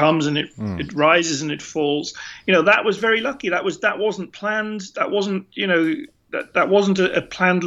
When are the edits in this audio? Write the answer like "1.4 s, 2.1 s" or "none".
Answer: none